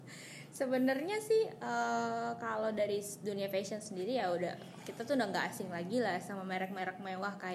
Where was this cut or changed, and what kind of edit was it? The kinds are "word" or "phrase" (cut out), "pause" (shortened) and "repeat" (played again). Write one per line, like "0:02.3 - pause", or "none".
none